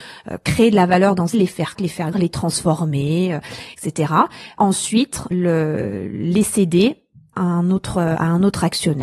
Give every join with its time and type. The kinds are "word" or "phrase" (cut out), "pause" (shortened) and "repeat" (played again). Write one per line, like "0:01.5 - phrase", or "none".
0:01.3 - word
0:01.8 - word
0:02.1 - word
0:04.6 - word
0:05.3 - word
0:07.3 - word

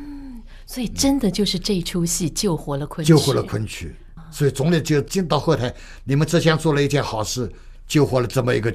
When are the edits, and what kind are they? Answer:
none

